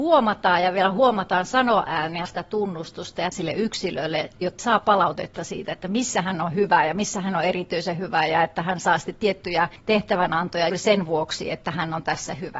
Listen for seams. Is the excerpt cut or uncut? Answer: cut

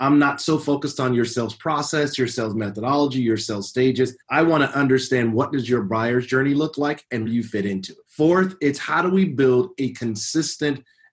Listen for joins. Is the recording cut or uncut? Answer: cut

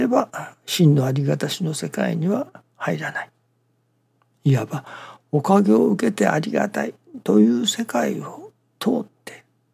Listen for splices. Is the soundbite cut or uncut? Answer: uncut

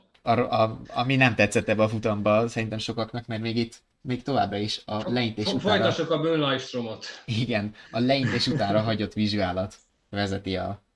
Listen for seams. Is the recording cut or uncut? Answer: uncut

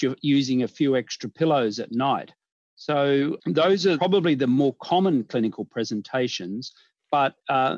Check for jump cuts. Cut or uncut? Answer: uncut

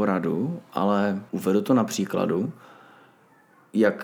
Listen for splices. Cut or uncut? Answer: cut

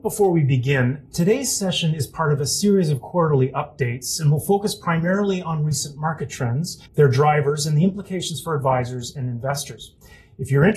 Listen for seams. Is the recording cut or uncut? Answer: cut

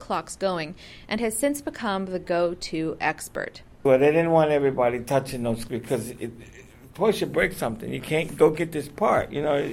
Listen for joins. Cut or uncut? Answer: cut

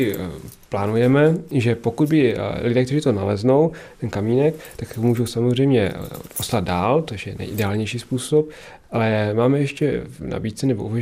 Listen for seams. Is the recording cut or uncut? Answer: uncut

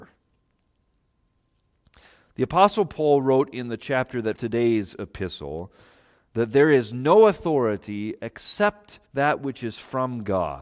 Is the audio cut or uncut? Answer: cut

